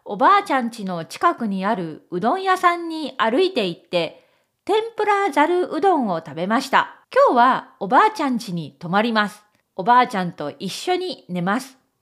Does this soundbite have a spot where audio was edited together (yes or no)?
yes